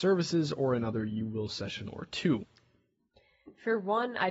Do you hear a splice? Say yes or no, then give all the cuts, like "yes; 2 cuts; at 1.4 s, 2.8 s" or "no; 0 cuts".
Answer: no; 0 cuts